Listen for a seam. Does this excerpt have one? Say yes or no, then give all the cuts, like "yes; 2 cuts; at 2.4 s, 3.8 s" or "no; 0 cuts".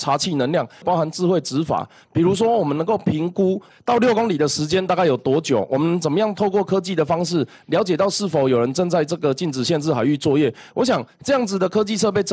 no; 0 cuts